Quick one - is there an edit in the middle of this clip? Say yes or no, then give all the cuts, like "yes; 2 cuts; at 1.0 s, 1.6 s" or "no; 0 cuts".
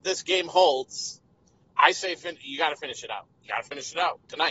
no; 0 cuts